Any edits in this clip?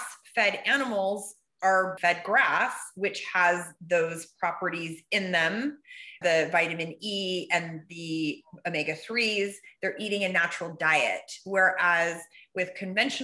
yes; 2 cuts; at 2.0 s, 6.2 s

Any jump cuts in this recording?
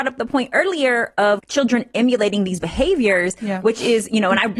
yes; 1 cut; at 1.4 s

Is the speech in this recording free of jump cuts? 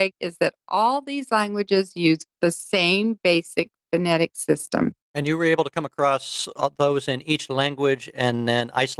no; 2 cuts; at 2.3 s, 5.0 s

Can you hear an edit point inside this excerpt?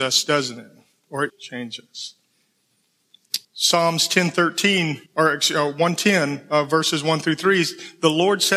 yes; 3 cuts; at 1.3 s, 3.4 s, 5.1 s

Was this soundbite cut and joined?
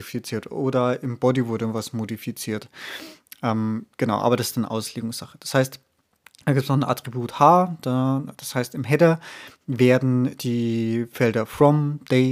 no; 0 cuts

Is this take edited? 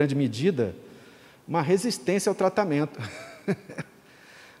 no; 0 cuts

